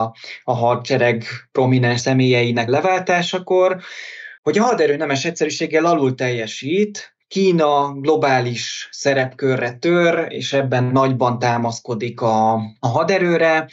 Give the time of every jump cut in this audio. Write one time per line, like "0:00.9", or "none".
0:04.4